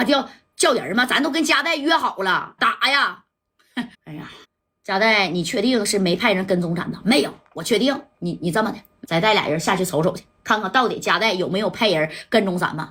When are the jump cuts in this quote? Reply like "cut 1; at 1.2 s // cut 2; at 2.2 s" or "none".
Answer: cut 1; at 2.6 s // cut 2; at 3.9 s // cut 3; at 4.4 s // cut 4; at 9.0 s